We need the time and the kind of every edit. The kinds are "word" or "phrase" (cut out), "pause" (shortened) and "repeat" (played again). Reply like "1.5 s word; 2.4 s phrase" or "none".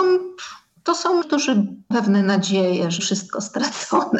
1.2 s word; 1.9 s word; 3.0 s word